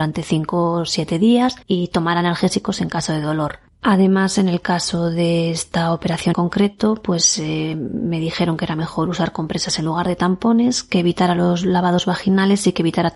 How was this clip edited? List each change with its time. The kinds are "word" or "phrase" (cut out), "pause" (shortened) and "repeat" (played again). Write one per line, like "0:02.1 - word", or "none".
0:01.6 - pause
0:03.7 - pause
0:06.3 - word